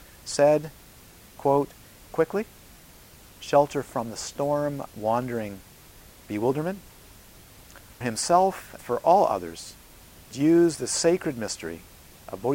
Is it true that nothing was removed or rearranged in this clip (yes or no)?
no